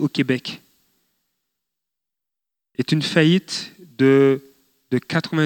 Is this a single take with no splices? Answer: yes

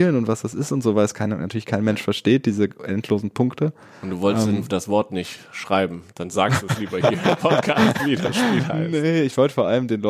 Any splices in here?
no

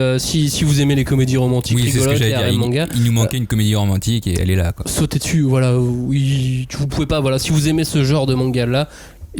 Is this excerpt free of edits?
yes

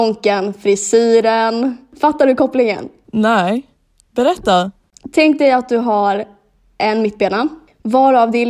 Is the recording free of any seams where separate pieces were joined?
yes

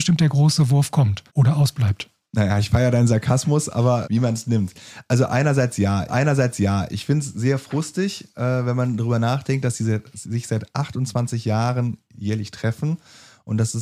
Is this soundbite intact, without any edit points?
no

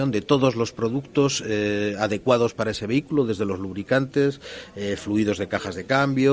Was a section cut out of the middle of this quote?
no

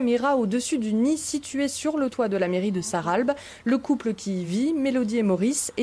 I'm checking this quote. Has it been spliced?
no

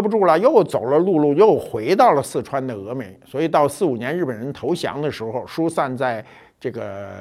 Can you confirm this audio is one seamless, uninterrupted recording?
yes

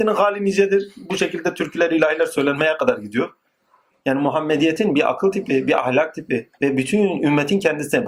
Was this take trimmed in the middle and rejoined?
yes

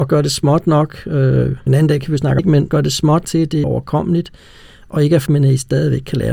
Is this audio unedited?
no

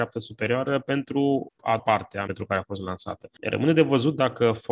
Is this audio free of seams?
no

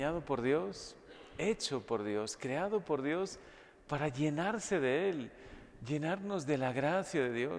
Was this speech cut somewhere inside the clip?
no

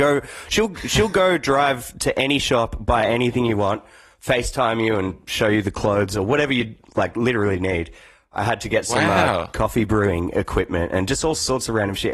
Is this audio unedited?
yes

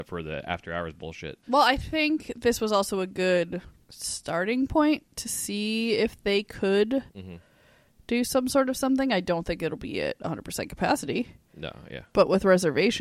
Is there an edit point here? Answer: yes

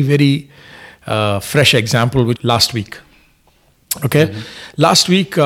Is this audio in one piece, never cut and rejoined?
no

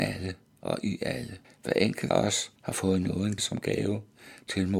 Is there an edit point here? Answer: yes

